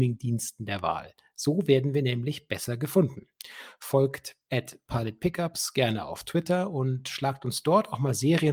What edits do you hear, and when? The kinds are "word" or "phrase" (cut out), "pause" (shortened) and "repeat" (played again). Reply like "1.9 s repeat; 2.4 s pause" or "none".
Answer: none